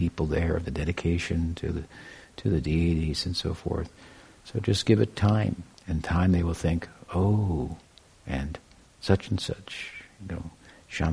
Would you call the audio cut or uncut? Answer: cut